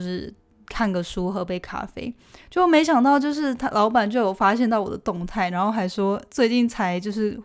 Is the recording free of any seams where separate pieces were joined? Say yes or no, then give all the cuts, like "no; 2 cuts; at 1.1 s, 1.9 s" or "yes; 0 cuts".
yes; 0 cuts